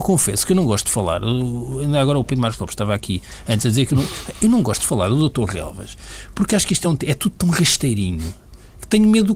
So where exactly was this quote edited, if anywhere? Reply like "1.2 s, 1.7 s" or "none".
none